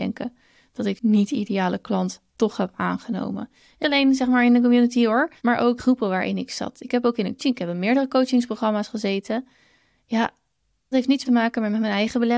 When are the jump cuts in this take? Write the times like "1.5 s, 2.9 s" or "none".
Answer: 1.0 s, 2.3 s, 3.8 s, 5.4 s, 5.8 s, 7.4 s, 10.9 s, 11.2 s